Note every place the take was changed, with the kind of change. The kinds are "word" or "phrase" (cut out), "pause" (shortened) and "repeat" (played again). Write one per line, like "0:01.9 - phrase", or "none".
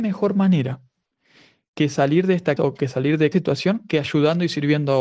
0:02.6 - word
0:03.3 - word

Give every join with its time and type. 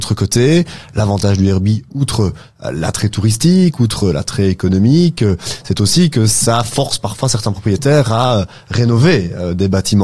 none

